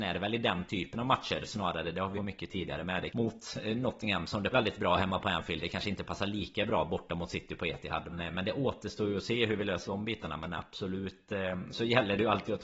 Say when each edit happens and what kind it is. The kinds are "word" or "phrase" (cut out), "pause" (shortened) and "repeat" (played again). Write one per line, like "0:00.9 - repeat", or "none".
0:02.2 - phrase
0:03.1 - word
0:04.5 - phrase
0:08.1 - word
0:09.8 - word
0:11.7 - word